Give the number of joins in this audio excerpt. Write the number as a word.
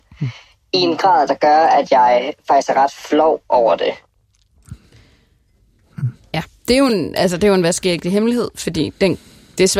zero